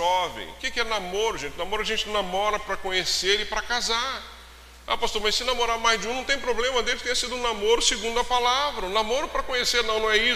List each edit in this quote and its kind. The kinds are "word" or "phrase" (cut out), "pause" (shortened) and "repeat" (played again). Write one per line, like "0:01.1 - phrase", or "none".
none